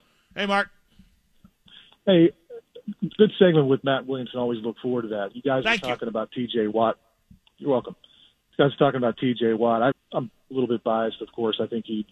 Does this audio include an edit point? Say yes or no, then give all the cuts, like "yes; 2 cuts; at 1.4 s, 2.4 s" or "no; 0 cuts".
yes; 1 cut; at 9.9 s